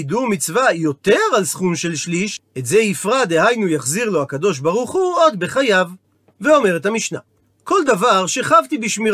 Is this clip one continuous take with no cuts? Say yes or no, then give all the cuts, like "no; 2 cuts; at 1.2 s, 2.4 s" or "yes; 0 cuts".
yes; 0 cuts